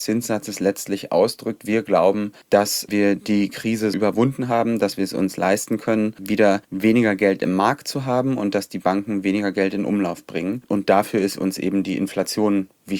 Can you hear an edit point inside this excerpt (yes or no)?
yes